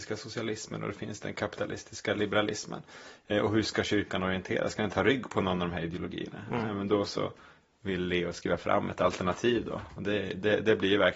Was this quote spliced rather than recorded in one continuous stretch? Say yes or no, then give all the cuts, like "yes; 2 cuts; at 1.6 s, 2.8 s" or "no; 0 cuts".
no; 0 cuts